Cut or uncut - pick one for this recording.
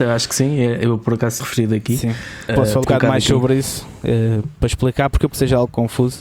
cut